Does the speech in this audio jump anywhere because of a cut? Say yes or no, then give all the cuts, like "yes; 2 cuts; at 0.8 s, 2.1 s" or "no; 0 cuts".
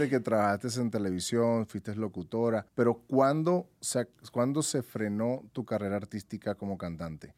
yes; 1 cut; at 2.7 s